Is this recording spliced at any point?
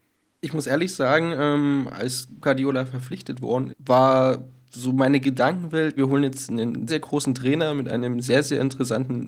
yes; 4 cuts; at 2.4 s, 3.7 s, 6.0 s, 6.9 s

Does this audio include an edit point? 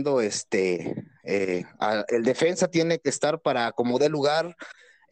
no; 0 cuts

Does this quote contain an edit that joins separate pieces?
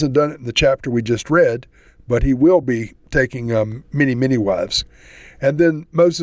no; 0 cuts

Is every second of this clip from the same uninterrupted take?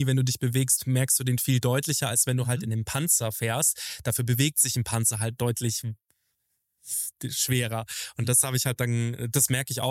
yes; 0 cuts

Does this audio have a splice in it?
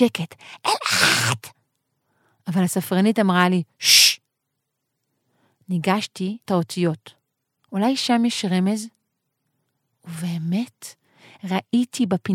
yes; 1 cut; at 6.5 s

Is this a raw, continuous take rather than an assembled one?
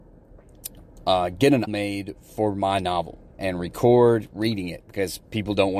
no; 2 cuts; at 1.7 s, 3.3 s

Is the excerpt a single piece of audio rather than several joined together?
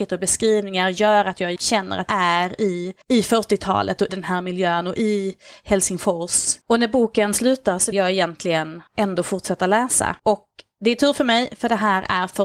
no; 8 cuts; at 1.6 s, 2.1 s, 3.0 s, 4.1 s, 6.6 s, 7.9 s, 8.9 s, 10.2 s

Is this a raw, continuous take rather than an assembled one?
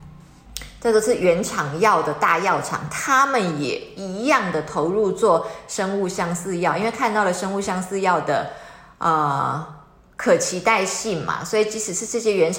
yes; 0 cuts

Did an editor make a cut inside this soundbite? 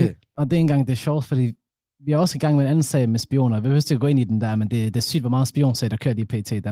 no; 0 cuts

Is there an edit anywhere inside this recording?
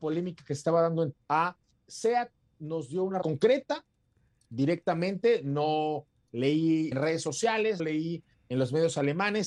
yes; 4 cuts; at 1.1 s, 3.2 s, 6.9 s, 7.8 s

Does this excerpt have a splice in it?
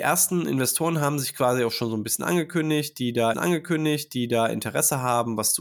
yes; 1 cut; at 3.3 s

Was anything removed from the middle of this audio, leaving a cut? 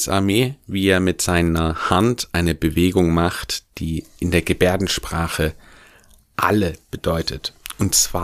no; 0 cuts

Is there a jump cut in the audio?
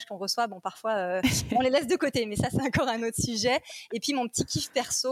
no; 0 cuts

